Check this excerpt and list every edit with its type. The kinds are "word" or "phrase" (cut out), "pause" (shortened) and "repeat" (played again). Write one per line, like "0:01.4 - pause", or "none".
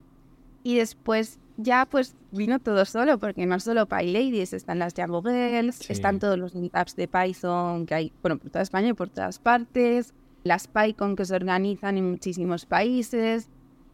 0:02.2 - pause
0:08.2 - pause
0:10.5 - word